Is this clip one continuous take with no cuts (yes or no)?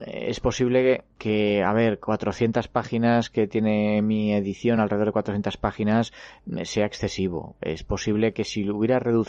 yes